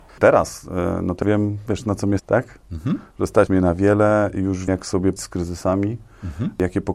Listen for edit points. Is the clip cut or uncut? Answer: cut